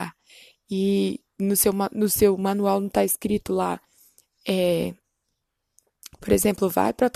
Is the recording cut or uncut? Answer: uncut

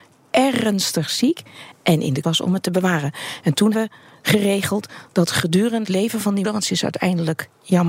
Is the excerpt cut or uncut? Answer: cut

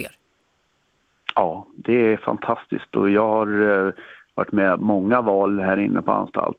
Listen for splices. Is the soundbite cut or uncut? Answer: uncut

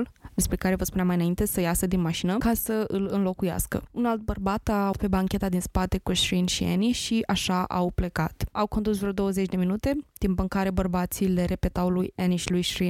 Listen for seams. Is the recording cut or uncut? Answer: cut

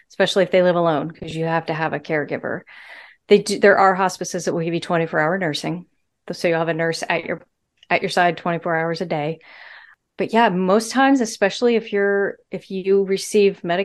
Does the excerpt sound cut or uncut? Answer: uncut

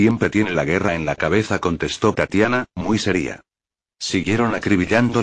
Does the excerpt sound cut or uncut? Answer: uncut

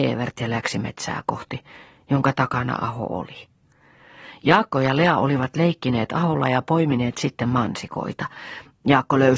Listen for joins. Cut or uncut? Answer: uncut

